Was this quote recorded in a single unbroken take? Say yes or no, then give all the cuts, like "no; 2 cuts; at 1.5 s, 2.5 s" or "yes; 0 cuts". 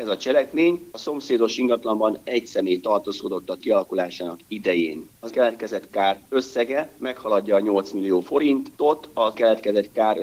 no; 3 cuts; at 3.6 s, 5.3 s, 9.3 s